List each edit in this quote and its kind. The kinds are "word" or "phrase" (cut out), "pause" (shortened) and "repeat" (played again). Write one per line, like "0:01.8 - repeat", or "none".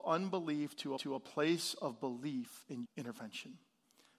0:01.0 - repeat
0:02.8 - phrase